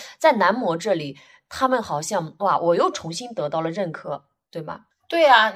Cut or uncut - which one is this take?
uncut